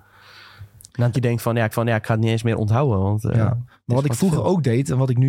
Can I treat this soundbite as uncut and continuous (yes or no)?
no